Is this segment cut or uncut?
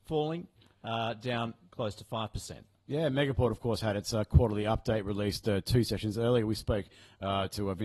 uncut